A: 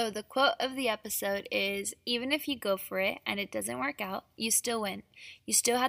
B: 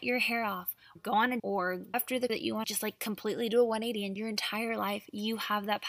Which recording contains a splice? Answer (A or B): B